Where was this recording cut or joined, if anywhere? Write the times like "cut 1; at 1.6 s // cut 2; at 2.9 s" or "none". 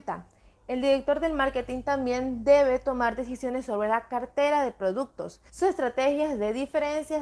cut 1; at 5.5 s